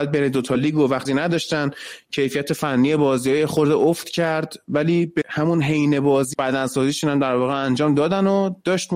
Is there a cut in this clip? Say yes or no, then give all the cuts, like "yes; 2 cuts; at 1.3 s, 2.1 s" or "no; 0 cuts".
yes; 3 cuts; at 1.0 s, 5.2 s, 6.3 s